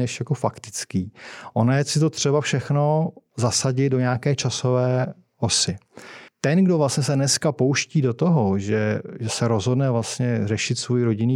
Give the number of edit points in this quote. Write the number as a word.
one